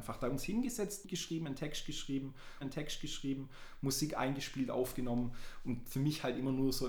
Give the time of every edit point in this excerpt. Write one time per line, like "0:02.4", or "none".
0:01.0
0:02.6